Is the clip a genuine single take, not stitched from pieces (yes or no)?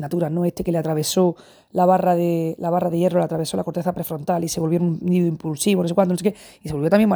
yes